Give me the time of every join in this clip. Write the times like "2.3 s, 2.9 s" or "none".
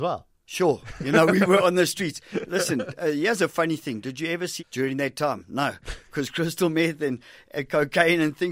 4.6 s